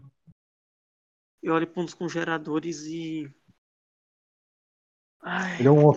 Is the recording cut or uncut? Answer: uncut